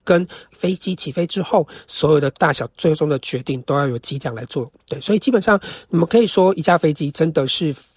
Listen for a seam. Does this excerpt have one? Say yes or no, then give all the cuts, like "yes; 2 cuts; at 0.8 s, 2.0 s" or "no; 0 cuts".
yes; 1 cut; at 4.8 s